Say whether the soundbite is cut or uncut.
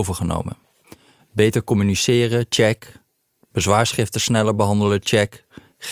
uncut